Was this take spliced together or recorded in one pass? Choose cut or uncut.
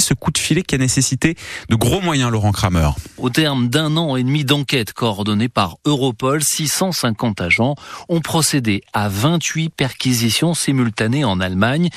uncut